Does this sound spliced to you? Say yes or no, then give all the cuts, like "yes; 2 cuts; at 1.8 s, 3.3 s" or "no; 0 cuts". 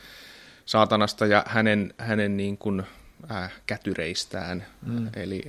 no; 0 cuts